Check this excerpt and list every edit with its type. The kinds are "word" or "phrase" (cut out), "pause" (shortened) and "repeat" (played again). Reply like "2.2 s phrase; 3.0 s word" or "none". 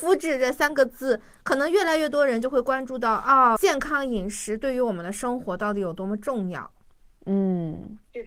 3.6 s word